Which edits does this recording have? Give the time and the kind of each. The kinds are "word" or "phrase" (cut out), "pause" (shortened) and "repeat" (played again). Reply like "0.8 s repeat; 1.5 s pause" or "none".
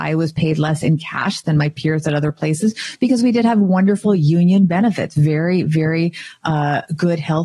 none